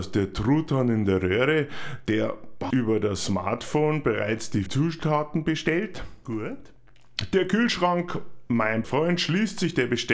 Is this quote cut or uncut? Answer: cut